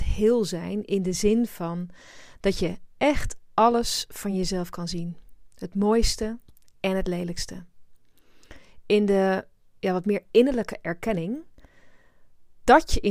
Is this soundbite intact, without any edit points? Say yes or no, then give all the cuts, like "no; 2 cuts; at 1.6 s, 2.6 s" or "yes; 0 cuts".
yes; 0 cuts